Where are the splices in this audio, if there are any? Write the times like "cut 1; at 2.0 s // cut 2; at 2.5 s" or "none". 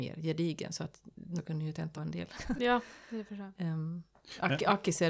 cut 1; at 1.4 s // cut 2; at 2.0 s